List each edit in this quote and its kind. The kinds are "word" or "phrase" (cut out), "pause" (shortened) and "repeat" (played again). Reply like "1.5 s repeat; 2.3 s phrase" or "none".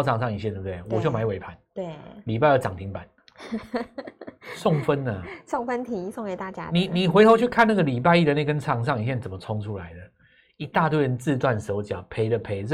none